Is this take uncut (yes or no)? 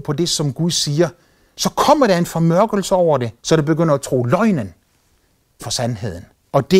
no